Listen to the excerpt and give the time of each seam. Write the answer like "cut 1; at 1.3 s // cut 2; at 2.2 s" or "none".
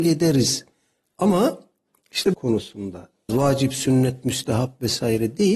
cut 1; at 2.3 s // cut 2; at 3.3 s